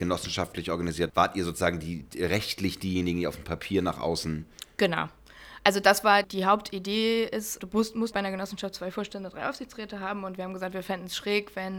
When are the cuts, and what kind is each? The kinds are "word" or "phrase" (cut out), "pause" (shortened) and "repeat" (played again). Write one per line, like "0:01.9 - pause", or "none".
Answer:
0:01.1 - word
0:06.2 - word
0:07.6 - word
0:08.1 - word